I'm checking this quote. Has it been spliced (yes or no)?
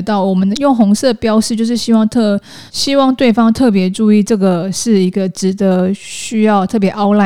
yes